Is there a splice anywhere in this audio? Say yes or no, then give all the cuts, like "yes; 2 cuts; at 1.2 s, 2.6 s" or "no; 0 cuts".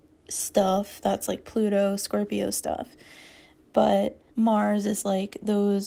yes; 1 cut; at 4.3 s